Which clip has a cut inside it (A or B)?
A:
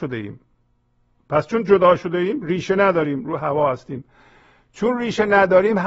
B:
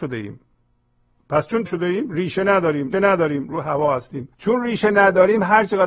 B